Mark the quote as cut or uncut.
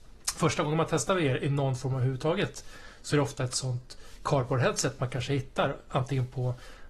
uncut